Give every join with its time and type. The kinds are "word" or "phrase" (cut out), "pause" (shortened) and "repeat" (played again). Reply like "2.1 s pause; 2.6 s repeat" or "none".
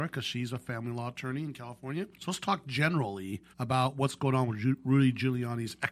2.1 s pause; 3.5 s pause